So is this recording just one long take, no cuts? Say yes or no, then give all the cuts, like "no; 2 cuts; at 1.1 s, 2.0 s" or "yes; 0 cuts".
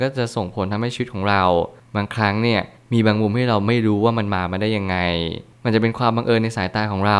yes; 0 cuts